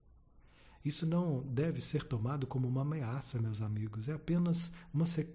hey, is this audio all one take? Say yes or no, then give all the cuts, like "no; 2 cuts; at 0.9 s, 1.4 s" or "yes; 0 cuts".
yes; 0 cuts